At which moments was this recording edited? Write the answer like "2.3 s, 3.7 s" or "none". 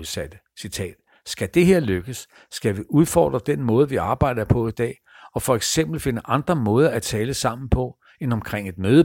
none